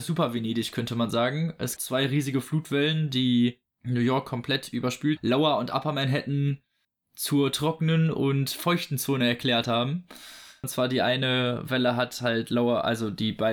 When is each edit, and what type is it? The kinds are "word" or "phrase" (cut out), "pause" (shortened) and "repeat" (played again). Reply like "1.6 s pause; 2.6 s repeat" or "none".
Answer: 1.8 s word; 3.7 s pause; 5.2 s phrase